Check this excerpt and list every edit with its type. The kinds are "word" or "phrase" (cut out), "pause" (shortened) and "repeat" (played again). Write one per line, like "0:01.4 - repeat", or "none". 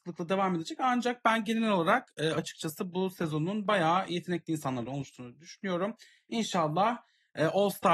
none